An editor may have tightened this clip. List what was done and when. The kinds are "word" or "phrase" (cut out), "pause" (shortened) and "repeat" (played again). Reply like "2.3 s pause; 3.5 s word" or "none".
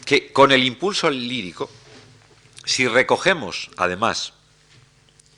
none